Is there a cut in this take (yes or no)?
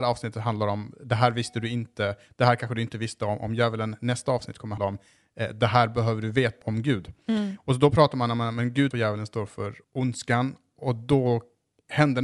yes